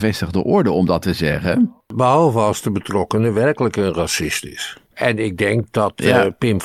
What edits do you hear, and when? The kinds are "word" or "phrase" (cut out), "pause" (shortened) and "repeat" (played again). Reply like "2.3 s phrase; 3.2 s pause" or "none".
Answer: 1.0 s word